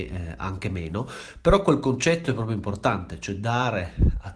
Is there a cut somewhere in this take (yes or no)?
no